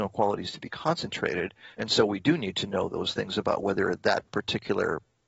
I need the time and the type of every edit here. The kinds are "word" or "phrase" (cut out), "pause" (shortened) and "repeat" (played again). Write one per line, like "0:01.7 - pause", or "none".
0:01.7 - pause